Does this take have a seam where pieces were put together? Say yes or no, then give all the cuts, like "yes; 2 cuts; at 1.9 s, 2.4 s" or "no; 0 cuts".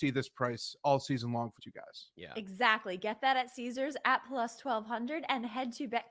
yes; 1 cut; at 1.6 s